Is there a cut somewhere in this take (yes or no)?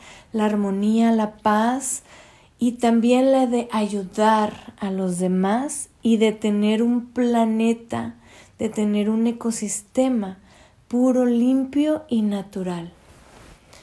no